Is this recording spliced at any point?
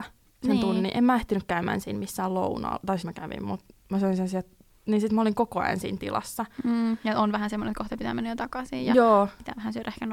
yes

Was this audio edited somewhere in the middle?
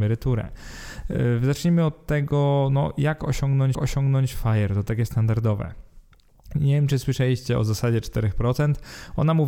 yes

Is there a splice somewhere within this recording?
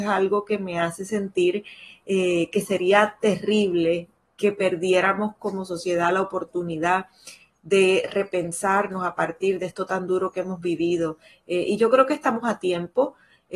no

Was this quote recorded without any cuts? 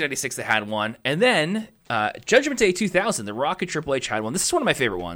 yes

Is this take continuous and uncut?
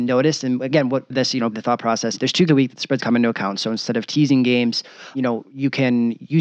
no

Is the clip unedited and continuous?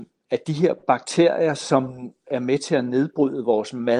yes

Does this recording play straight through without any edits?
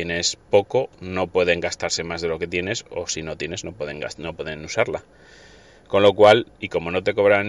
yes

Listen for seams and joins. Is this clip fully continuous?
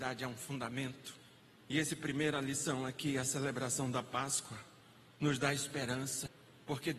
yes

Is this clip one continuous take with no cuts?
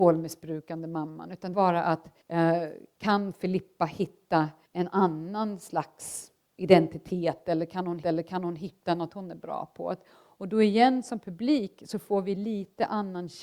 no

